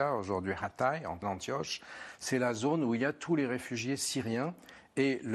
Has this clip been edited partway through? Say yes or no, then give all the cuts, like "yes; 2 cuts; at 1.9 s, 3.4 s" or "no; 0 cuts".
yes; 1 cut; at 1.2 s